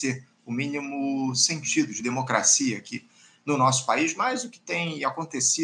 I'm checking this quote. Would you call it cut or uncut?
uncut